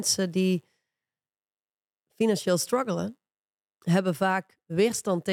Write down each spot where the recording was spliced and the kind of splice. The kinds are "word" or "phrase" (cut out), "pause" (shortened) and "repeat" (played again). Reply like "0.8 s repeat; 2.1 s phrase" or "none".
none